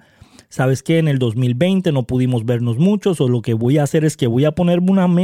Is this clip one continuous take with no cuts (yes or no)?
yes